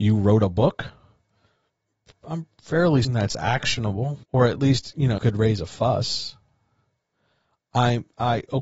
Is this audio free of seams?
no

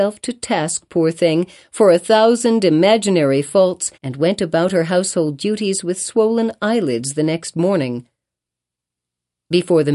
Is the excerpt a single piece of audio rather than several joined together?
no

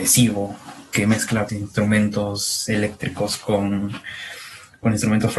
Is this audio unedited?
no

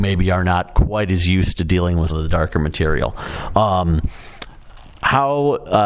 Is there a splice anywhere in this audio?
yes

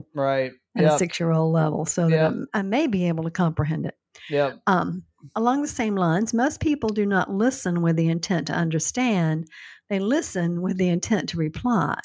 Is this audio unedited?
yes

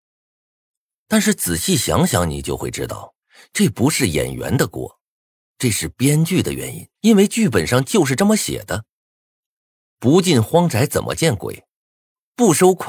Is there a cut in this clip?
yes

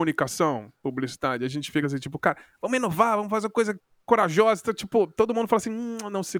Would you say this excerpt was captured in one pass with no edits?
yes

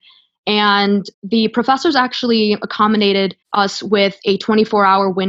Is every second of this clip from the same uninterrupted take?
no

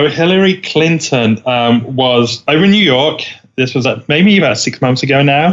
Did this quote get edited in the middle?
no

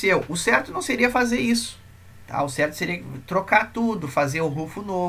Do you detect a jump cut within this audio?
no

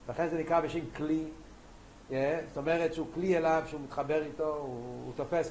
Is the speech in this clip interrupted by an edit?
no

